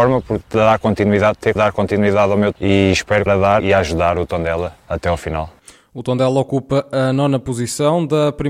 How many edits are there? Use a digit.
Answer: 4